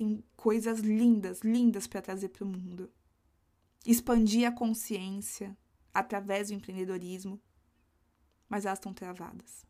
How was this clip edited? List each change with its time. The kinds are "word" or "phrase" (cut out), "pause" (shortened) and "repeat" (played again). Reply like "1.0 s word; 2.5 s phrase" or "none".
none

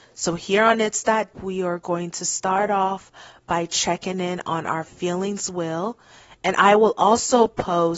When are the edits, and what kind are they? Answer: 1.3 s word

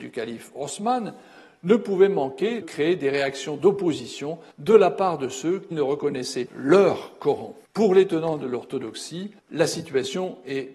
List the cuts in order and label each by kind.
2.6 s word; 4.5 s pause; 5.7 s word; 6.5 s word; 7.6 s pause; 9.4 s pause

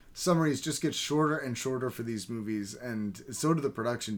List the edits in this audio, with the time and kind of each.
none

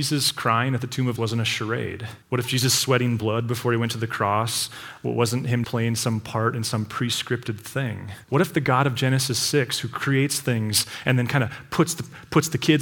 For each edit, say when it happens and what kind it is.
1.2 s word; 2.2 s pause; 5.6 s word; 8.2 s pause

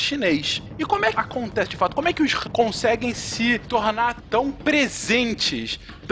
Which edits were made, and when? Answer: 1.1 s phrase; 2.4 s word

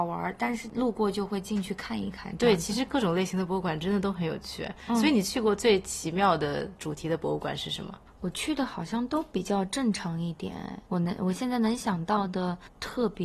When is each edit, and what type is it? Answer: 10.9 s pause

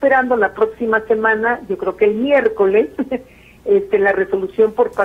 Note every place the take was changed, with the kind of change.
none

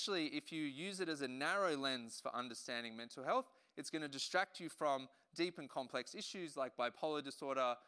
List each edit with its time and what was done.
none

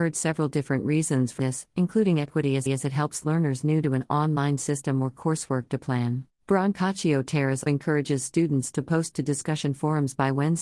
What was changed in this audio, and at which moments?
1.4 s word; 2.7 s repeat; 6.3 s pause; 7.7 s word

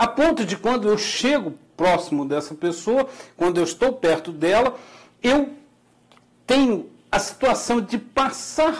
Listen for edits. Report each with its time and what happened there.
none

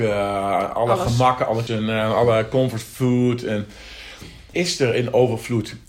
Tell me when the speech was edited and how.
1.7 s word; 4.5 s word

